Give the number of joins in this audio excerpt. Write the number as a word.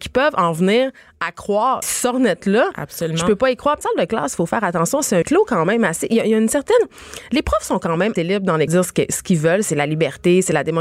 six